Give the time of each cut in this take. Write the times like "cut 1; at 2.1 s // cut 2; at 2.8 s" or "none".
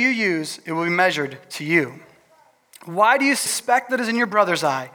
cut 1; at 3.5 s